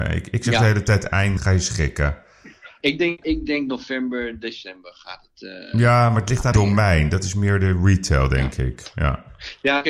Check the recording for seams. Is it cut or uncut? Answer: cut